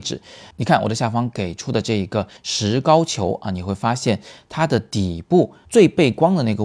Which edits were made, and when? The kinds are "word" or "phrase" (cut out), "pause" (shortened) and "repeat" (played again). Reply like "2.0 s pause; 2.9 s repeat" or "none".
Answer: 2.4 s pause

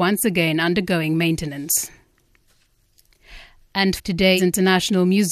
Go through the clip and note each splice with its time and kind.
4.0 s word; 4.4 s word

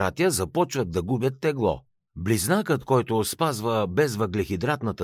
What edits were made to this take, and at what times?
none

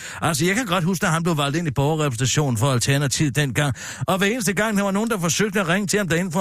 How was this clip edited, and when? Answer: none

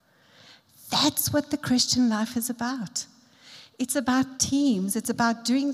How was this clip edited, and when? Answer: none

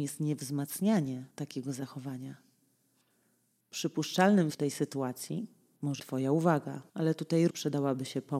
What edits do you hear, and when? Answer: 1.3 s pause; 4.5 s word; 6.0 s word; 6.9 s pause; 7.5 s word

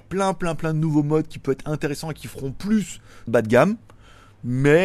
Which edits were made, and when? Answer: 3.3 s phrase

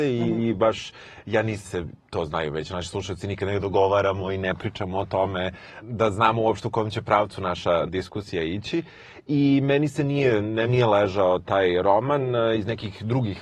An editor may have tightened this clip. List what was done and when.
1.6 s word; 5.8 s word; 7.9 s word; 10.7 s word

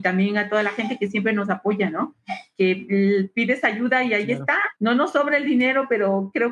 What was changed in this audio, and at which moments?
4.8 s pause

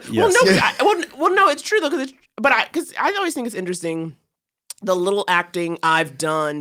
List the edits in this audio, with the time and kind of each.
none

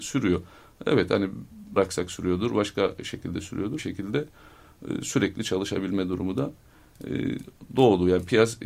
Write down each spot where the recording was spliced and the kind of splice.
1.8 s word; 3.8 s phrase

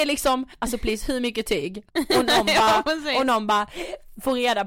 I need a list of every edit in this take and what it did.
1.9 s pause

